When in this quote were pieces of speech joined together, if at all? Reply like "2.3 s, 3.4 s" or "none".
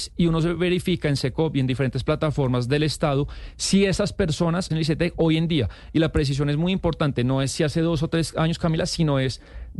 4.7 s

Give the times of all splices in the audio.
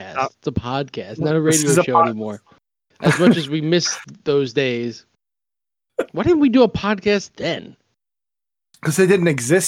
none

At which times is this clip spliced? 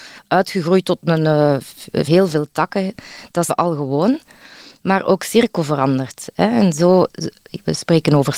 2.1 s, 3.5 s

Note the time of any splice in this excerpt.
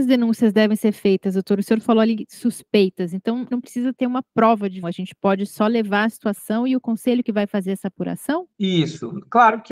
3.5 s, 4.8 s

